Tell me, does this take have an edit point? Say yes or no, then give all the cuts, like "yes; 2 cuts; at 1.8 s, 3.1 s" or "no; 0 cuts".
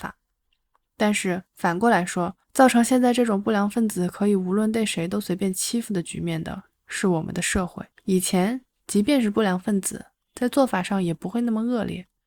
yes; 3 cuts; at 1.5 s, 2.4 s, 7.9 s